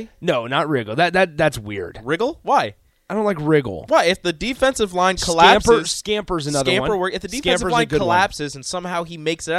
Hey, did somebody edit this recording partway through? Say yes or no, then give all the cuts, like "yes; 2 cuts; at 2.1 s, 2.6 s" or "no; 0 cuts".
no; 0 cuts